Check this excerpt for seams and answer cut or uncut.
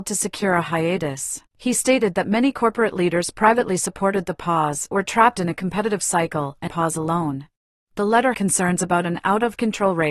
cut